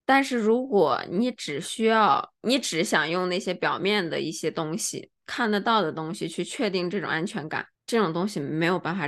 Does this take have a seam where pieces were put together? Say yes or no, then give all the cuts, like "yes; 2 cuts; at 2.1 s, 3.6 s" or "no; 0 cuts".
yes; 2 cuts; at 5.2 s, 7.7 s